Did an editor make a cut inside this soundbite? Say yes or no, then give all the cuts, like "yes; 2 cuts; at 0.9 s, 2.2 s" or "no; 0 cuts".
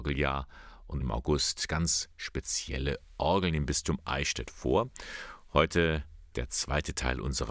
yes; 1 cut; at 1.0 s